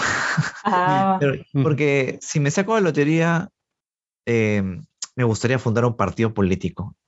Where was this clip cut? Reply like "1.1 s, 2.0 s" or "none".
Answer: none